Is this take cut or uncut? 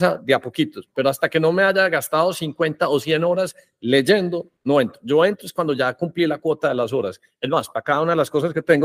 cut